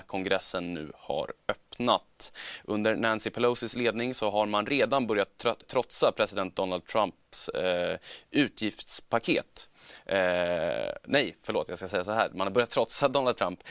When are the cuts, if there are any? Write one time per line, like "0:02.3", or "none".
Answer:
0:05.6